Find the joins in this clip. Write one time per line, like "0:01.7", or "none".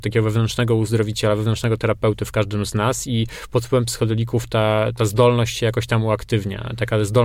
0:05.0